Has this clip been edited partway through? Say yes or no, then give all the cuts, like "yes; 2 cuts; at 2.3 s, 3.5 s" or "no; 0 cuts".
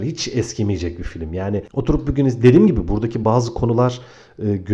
no; 0 cuts